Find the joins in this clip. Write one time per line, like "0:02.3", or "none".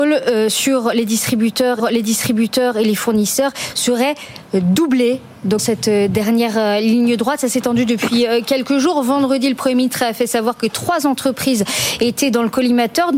0:01.8
0:05.6

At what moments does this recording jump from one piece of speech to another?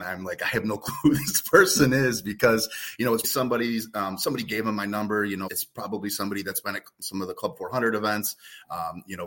0:03.2
0:05.5

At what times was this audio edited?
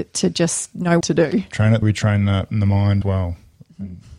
0:01.0
0:01.8
0:02.5
0:03.0

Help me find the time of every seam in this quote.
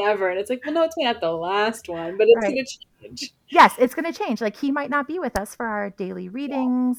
0:01.0

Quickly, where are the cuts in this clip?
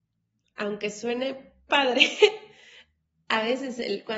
0:01.7

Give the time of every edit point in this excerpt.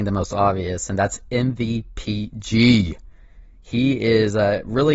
none

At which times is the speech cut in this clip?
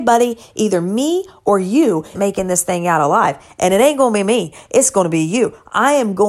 0:02.1

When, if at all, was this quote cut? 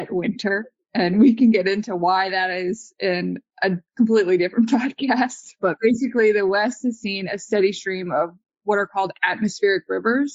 none

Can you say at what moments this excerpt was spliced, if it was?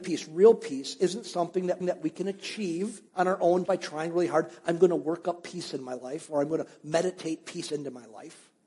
0:01.8
0:03.1
0:03.7

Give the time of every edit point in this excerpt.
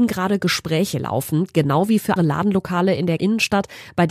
0:02.2
0:03.2

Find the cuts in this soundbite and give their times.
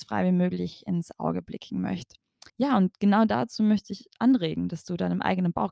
0:02.5

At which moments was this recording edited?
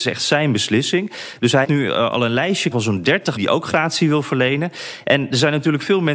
0:01.6
0:02.7
0:03.4

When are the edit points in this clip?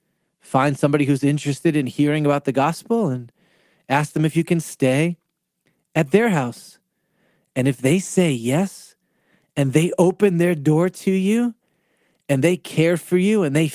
none

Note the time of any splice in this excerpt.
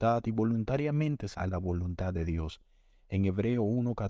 0:01.3

